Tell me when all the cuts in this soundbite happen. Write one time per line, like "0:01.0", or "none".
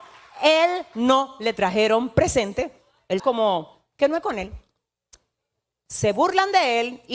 0:03.2